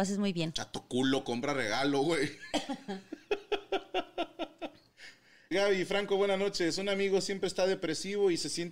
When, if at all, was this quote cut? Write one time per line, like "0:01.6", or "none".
0:05.5